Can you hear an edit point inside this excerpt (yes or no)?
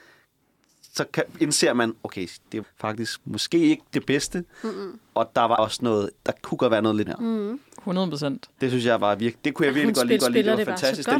yes